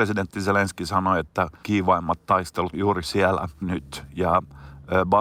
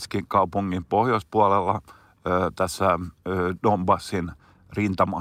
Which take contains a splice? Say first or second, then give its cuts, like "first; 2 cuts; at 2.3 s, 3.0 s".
first; 3 cuts; at 1.6 s, 2.7 s, 3.6 s